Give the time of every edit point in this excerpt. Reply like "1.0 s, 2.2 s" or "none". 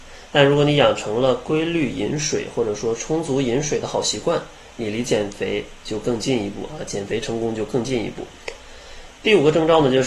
none